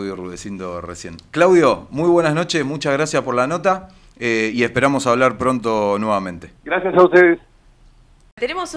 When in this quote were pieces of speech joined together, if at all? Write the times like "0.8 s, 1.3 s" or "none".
6.6 s